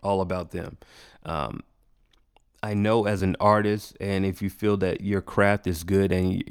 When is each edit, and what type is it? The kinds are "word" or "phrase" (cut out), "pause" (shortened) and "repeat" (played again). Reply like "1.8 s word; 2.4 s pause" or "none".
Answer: none